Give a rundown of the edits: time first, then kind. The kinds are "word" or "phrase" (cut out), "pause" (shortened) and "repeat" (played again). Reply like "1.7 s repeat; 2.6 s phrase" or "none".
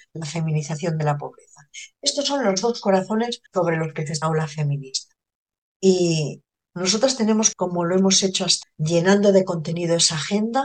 3.5 s pause; 4.2 s phrase; 6.7 s word; 7.5 s word; 8.6 s word